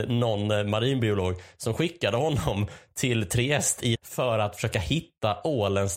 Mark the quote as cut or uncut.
cut